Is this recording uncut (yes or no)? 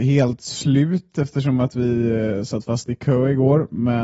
yes